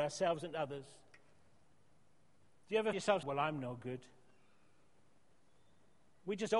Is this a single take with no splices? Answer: no; 2 cuts; at 2.9 s, 3.2 s

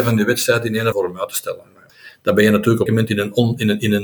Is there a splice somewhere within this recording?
yes; 2 cuts; at 0.9 s, 2.9 s

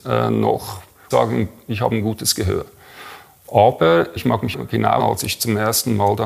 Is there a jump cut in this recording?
yes; 4 cuts; at 1.1 s, 4.2 s, 4.5 s, 5.0 s

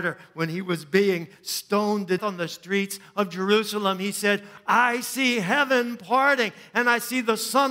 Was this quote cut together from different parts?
yes; 1 cut; at 2.2 s

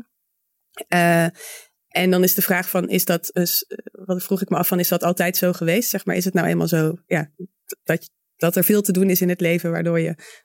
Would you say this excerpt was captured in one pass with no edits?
yes; 0 cuts

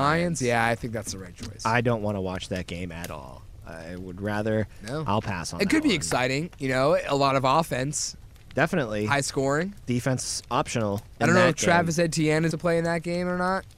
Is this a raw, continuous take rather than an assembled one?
no; 1 cut; at 12.5 s

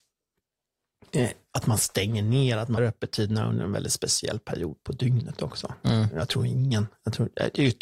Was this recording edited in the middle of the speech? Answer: yes; 1 cut; at 2.8 s

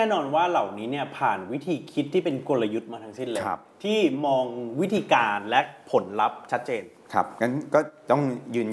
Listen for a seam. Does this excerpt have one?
no; 0 cuts

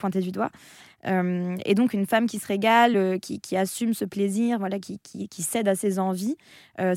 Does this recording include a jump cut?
no; 0 cuts

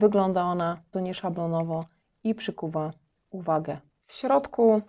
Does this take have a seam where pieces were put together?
yes; 1 cut; at 0.9 s

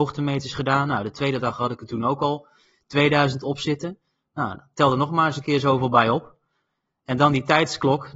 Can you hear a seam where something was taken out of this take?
no; 0 cuts

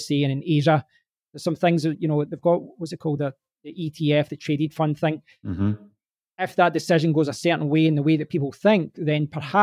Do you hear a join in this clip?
no; 0 cuts

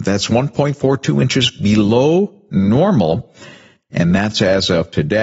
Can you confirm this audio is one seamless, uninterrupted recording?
yes; 0 cuts

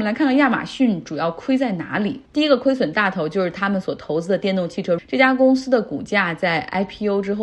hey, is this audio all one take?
no; 2 cuts; at 2.3 s, 5.0 s

